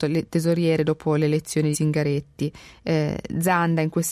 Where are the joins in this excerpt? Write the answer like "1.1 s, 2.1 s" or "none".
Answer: 1.7 s